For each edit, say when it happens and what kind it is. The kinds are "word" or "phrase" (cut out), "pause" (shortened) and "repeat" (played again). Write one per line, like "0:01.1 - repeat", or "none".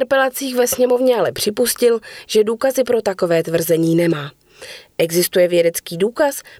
none